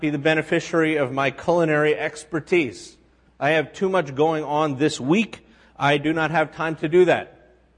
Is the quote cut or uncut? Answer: uncut